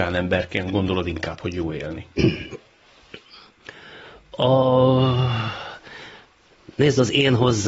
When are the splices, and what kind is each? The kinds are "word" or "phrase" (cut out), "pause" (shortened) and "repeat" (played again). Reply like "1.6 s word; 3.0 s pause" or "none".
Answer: none